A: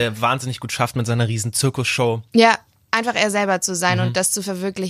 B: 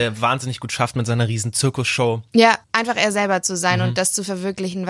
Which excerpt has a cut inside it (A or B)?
B